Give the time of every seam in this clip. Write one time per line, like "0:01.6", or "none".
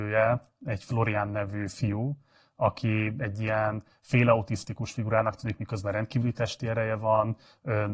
none